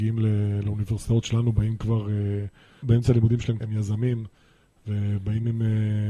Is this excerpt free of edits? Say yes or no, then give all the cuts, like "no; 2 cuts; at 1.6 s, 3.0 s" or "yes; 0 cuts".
no; 2 cuts; at 2.8 s, 3.6 s